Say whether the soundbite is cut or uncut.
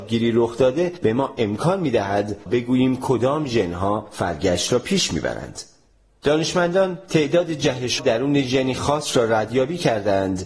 cut